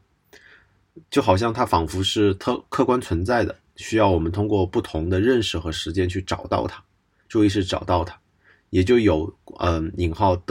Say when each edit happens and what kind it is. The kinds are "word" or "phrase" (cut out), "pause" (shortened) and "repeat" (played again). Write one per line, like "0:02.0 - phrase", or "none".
none